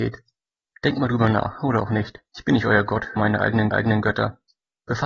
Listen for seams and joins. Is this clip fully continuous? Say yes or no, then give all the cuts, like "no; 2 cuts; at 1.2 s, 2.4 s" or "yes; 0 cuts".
no; 3 cuts; at 2.3 s, 3.2 s, 3.7 s